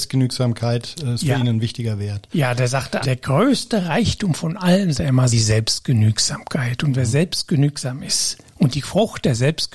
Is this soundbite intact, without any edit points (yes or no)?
no